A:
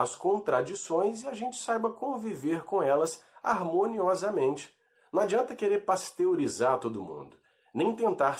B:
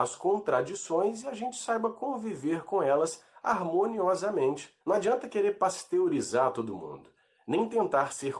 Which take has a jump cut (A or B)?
B